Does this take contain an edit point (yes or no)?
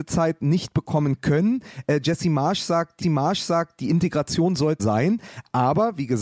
yes